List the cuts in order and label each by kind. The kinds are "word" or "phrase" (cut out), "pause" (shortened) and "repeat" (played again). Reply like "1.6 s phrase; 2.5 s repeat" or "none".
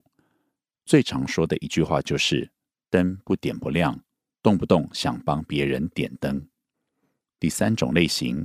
none